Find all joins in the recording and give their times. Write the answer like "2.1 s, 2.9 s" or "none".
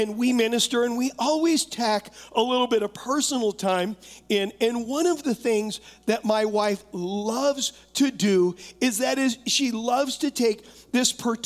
none